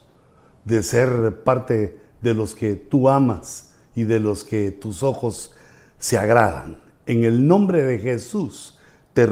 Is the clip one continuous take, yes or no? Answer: yes